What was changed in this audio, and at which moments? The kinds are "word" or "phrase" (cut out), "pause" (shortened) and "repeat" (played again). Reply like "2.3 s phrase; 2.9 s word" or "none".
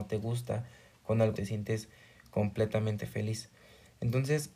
1.3 s word